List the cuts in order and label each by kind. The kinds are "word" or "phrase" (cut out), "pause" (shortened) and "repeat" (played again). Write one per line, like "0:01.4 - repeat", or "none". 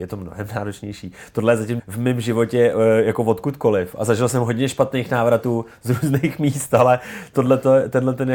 0:01.8 - phrase